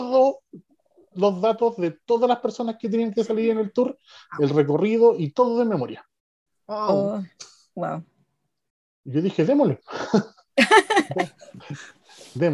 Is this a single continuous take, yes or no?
yes